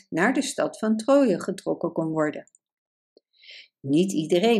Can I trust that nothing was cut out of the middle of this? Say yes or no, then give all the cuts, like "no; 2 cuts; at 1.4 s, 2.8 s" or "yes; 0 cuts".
yes; 0 cuts